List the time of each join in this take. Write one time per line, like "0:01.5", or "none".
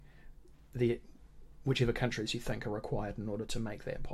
none